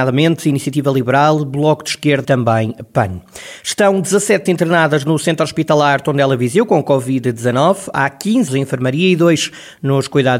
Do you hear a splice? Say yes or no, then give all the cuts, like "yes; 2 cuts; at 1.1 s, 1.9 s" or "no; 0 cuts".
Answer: yes; 3 cuts; at 2.2 s, 4.5 s, 8.5 s